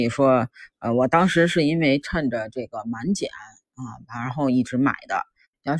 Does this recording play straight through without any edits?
yes; 0 cuts

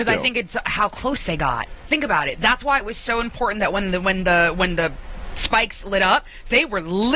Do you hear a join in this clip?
no; 0 cuts

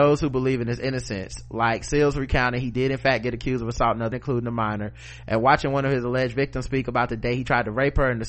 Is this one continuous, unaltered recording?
no; 1 cut; at 4.1 s

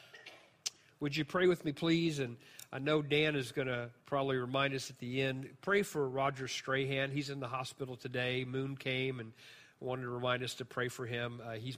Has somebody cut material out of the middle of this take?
yes; 1 cut; at 4.0 s

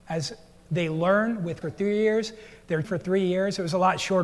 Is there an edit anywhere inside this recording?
yes; 2 cuts; at 1.6 s, 2.8 s

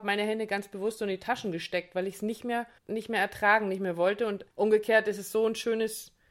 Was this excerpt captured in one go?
no; 2 cuts; at 2.8 s, 4.5 s

